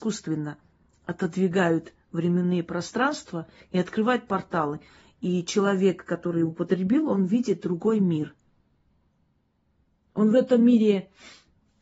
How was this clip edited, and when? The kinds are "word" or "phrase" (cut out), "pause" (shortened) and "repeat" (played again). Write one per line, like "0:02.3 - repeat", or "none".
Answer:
none